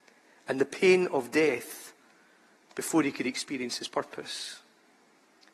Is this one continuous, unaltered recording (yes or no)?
yes